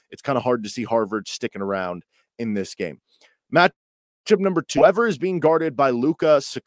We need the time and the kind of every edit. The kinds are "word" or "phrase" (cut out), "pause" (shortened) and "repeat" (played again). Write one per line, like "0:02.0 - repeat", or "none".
none